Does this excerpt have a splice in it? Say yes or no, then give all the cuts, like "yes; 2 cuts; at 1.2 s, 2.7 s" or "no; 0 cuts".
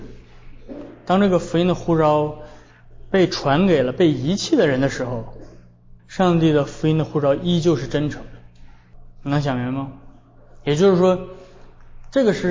yes; 1 cut; at 6.0 s